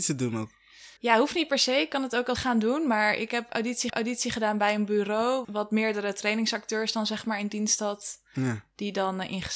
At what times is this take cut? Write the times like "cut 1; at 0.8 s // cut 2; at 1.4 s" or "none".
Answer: cut 1; at 1.0 s // cut 2; at 2.4 s // cut 3; at 3.9 s // cut 4; at 5.4 s